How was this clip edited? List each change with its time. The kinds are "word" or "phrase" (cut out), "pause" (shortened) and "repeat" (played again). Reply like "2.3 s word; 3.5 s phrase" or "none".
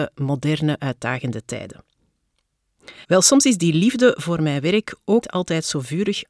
3.0 s pause; 5.2 s word

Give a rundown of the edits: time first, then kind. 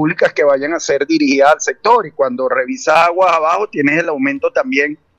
none

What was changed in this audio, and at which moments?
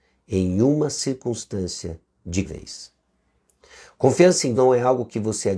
2.4 s word; 4.5 s word

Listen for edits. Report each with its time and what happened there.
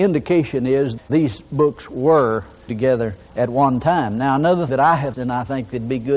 1.0 s word; 2.7 s word; 4.7 s word; 5.1 s word

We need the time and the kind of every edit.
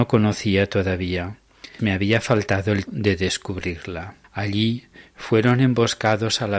1.8 s word; 2.9 s word; 4.2 s pause

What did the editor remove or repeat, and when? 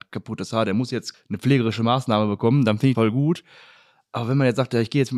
1.1 s word; 2.9 s word

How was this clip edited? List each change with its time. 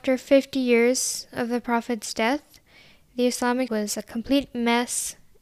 3.7 s word

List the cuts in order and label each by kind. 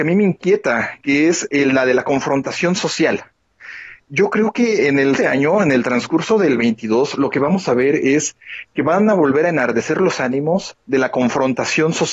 5.2 s word

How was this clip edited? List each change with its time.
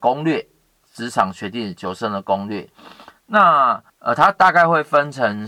3.9 s pause

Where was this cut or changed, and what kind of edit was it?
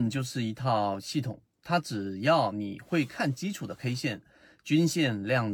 none

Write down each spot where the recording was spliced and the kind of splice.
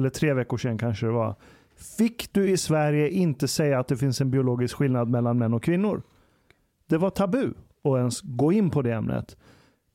none

